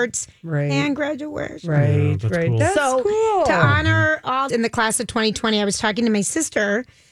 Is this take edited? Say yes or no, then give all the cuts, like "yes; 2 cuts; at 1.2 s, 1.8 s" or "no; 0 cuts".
yes; 1 cut; at 4.5 s